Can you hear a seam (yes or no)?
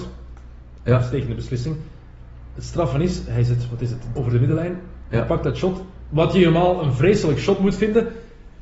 yes